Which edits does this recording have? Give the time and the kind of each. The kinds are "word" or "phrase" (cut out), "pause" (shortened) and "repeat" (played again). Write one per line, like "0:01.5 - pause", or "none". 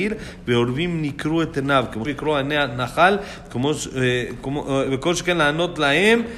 0:02.0 - word